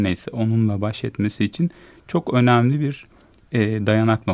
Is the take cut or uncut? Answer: uncut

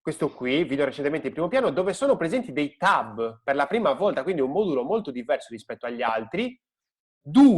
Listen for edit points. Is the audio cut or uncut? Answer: uncut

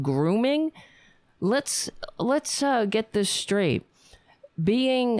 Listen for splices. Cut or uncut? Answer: uncut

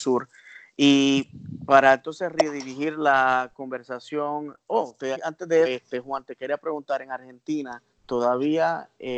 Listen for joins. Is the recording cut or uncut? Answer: cut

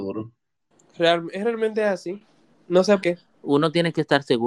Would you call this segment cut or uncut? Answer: cut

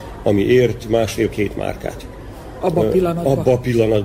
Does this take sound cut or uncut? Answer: uncut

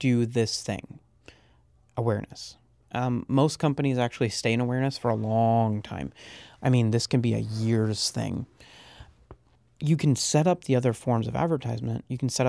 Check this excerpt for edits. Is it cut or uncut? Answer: uncut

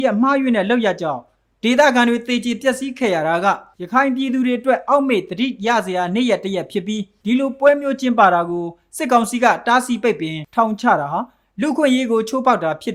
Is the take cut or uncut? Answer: uncut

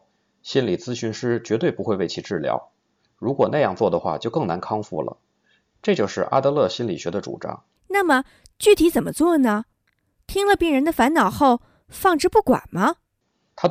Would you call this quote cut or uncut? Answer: uncut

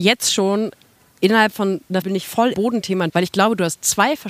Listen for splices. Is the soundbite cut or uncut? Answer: cut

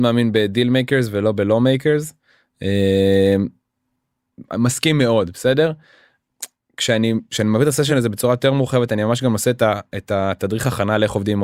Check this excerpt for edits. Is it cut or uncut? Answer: uncut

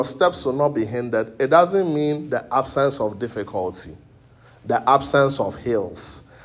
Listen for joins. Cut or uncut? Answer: uncut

